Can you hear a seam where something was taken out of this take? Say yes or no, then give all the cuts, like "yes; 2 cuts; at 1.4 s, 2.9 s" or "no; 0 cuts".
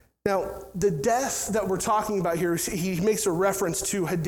no; 0 cuts